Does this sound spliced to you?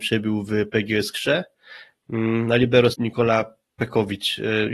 yes; 1 cut; at 2.9 s

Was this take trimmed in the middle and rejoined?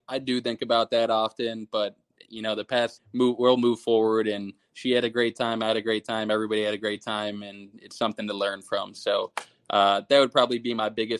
yes; 1 cut; at 3.0 s

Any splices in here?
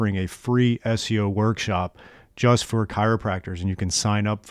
no; 0 cuts

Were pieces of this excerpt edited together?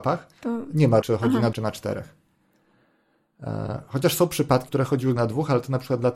yes; 4 cuts; at 1.0 s, 1.5 s, 4.7 s, 5.2 s

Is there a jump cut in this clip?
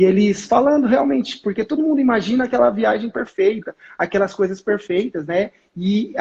no; 0 cuts

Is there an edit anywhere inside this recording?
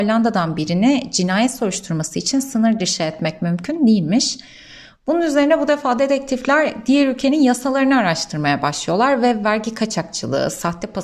no; 0 cuts

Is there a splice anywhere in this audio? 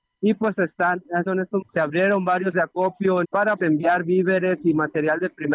yes; 5 cuts; at 1.3 s, 1.6 s, 2.5 s, 3.2 s, 3.6 s

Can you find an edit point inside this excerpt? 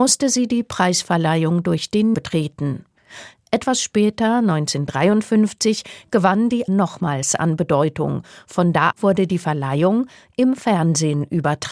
yes; 3 cuts; at 2.1 s, 6.7 s, 8.9 s

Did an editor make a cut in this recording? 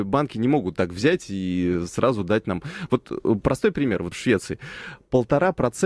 yes; 1 cut; at 4.1 s

